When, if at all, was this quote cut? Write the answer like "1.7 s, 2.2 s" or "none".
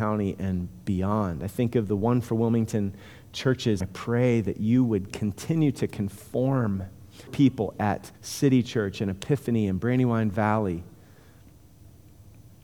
3.8 s, 7.3 s, 8.2 s